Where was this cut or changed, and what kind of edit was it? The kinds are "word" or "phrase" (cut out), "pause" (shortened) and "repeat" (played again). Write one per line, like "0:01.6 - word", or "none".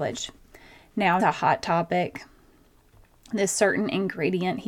0:01.2 - phrase